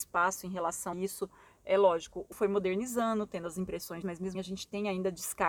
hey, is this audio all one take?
no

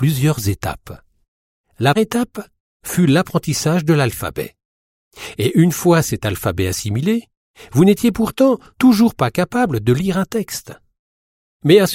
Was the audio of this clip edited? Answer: yes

